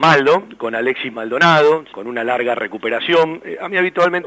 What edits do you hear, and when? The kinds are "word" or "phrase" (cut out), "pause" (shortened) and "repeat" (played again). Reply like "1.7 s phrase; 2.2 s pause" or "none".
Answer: 1.9 s word